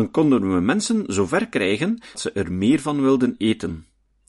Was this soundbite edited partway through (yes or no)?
yes